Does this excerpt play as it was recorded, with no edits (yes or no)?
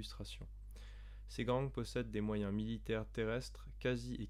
yes